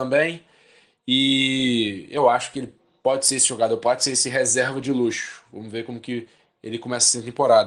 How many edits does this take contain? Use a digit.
0